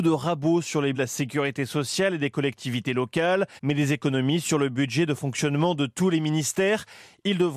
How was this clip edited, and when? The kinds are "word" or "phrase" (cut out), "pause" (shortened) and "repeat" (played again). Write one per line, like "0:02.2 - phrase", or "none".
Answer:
0:00.9 - word
0:03.6 - pause